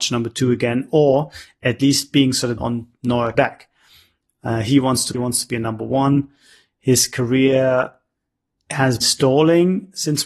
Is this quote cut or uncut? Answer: cut